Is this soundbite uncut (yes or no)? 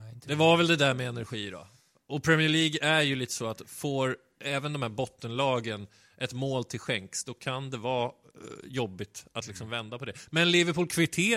yes